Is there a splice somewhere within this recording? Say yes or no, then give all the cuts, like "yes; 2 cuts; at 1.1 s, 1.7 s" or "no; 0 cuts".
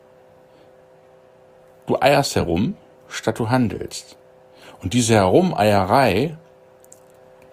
no; 0 cuts